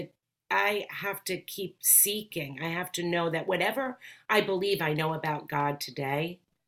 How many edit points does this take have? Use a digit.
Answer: 0